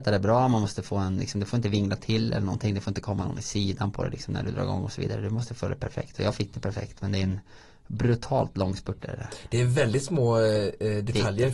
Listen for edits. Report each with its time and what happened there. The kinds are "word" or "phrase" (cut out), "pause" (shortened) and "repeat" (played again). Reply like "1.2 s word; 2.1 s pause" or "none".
none